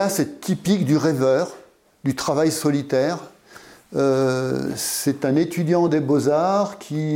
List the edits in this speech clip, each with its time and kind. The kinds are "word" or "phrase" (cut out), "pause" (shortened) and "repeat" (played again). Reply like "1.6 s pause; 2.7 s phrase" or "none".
none